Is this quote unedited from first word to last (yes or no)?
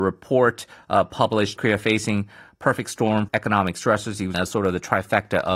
no